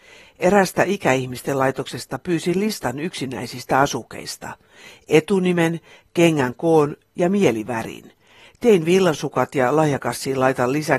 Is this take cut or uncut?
uncut